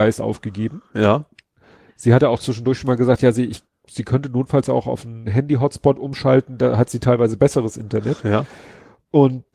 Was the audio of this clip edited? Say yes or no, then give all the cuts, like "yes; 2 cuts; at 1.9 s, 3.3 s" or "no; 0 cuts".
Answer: no; 0 cuts